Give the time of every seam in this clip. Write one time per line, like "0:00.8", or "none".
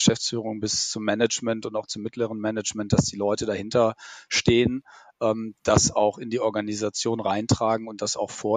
none